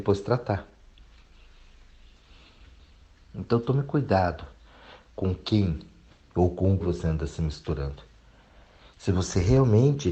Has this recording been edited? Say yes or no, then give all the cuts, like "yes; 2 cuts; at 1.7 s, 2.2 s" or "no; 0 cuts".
yes; 1 cut; at 6.8 s